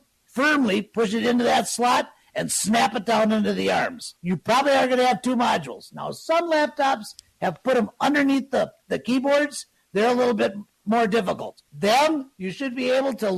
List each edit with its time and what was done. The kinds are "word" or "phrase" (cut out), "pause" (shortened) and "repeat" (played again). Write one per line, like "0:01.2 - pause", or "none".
0:04.2 - pause
0:11.7 - pause